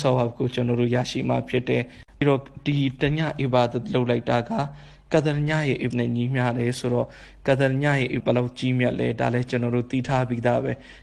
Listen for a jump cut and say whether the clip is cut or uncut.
cut